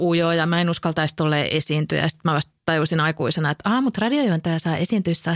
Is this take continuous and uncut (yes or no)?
yes